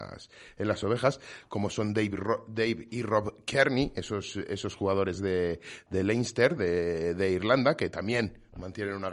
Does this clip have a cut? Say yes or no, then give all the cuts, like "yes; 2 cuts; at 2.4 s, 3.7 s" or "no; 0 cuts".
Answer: no; 0 cuts